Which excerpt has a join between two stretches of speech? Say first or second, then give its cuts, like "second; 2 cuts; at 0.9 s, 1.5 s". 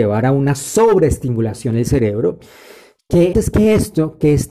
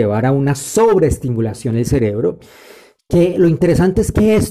first; 1 cut; at 3.3 s